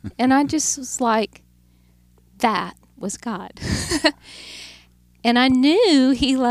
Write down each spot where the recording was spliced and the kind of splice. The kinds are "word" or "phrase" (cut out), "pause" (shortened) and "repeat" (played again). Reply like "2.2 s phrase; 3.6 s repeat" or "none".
none